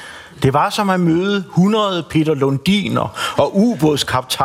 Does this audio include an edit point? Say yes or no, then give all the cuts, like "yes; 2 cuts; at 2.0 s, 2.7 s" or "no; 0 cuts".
no; 0 cuts